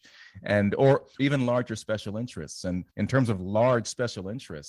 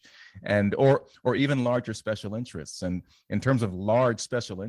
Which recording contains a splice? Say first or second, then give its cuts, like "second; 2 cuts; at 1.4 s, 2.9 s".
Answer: first; 2 cuts; at 1.2 s, 2.9 s